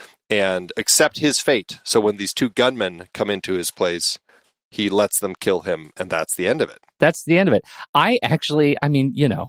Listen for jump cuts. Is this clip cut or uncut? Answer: uncut